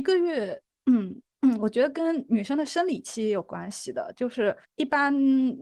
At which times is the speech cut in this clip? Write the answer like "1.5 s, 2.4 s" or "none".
4.6 s

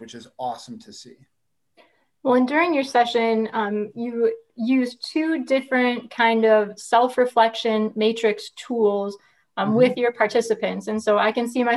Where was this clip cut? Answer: none

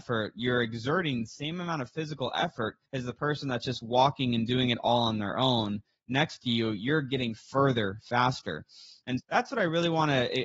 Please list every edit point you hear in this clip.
2.9 s, 9.2 s

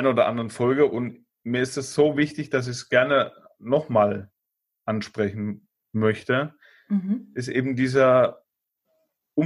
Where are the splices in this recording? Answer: none

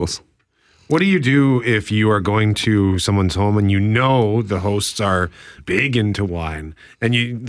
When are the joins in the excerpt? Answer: 5.6 s

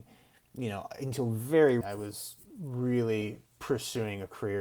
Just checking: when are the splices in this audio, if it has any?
1.8 s, 3.5 s

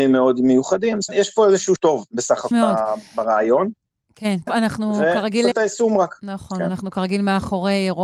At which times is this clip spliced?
1.1 s, 1.8 s, 2.5 s, 4.5 s, 5.5 s

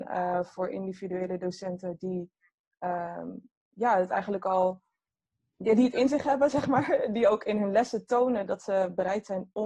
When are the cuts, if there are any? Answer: none

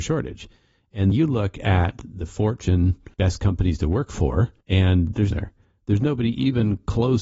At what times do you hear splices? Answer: 1.1 s, 3.1 s, 4.6 s, 5.3 s

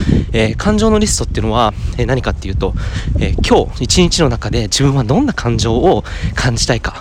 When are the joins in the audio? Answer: none

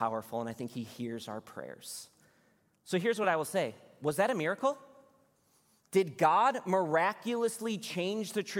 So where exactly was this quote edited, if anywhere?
none

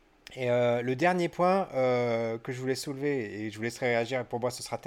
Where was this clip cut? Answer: none

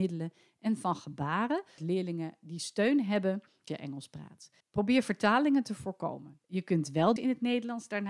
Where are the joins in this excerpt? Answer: 1.8 s, 3.7 s, 4.6 s, 6.4 s, 7.2 s

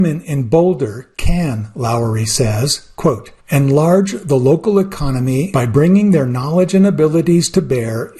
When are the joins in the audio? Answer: 3.4 s, 5.5 s

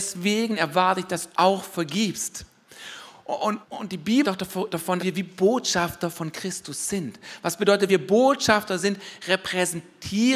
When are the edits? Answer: 1.3 s, 3.6 s, 4.2 s, 5.0 s, 7.9 s

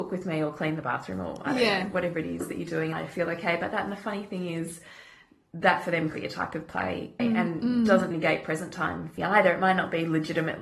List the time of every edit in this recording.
2.9 s, 6.1 s, 7.2 s, 8.1 s, 9.2 s

